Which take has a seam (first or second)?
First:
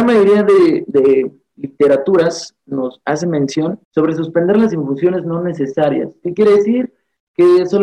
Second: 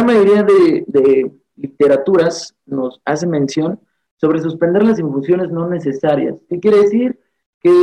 first